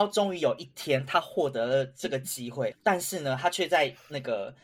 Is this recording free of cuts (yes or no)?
no